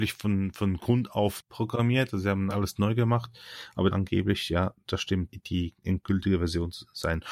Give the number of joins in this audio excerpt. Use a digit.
4